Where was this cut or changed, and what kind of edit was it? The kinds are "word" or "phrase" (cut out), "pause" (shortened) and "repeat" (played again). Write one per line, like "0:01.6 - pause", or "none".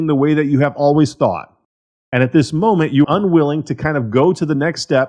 0:03.0 - word